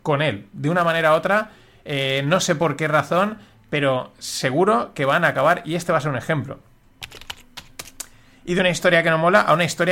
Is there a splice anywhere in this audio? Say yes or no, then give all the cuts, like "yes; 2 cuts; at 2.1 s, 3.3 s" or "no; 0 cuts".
no; 0 cuts